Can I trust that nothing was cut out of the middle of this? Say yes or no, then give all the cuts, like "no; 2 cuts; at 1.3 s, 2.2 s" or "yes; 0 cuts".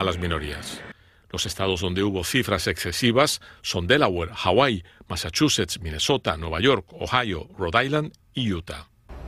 yes; 0 cuts